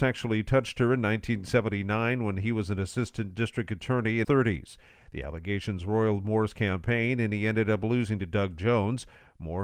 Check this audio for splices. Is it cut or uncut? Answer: cut